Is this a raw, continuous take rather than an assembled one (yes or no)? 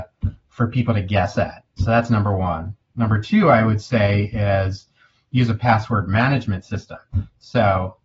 yes